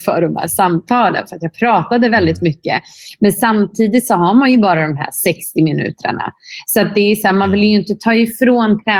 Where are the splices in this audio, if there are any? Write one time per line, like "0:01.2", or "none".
none